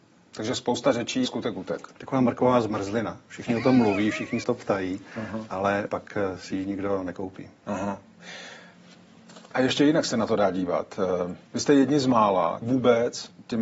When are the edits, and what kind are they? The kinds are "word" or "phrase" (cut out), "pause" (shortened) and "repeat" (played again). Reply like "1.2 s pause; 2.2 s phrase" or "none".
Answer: 1.2 s word; 4.4 s phrase; 5.9 s word; 11.5 s pause; 12.6 s word